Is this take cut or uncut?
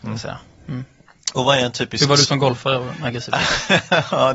uncut